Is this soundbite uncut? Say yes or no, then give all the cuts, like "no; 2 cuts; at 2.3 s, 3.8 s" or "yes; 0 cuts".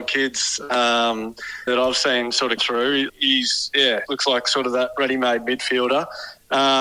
no; 4 cuts; at 1.7 s, 2.6 s, 3.1 s, 4.1 s